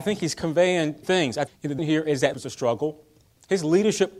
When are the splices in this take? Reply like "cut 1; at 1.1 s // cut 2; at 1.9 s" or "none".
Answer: cut 1; at 1.0 s // cut 2; at 1.5 s // cut 3; at 1.8 s // cut 4; at 2.3 s